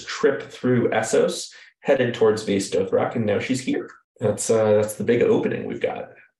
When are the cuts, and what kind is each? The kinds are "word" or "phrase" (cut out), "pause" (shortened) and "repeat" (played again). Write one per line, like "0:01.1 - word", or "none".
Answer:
none